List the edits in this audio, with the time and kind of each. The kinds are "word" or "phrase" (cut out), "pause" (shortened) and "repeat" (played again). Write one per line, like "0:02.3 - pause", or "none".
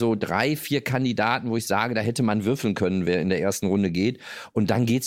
none